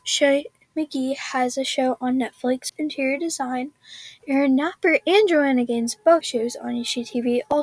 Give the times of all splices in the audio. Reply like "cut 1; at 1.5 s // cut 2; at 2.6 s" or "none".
cut 1; at 2.7 s // cut 2; at 6.2 s